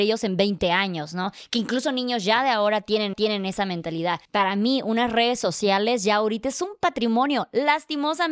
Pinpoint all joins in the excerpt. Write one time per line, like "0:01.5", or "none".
0:03.1
0:04.2